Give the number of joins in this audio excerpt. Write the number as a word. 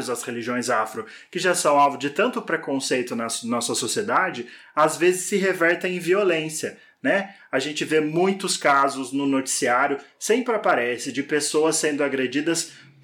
zero